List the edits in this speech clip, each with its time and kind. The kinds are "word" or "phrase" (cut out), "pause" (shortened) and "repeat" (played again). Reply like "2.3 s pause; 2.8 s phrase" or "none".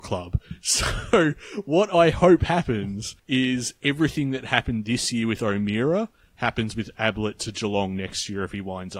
3.2 s pause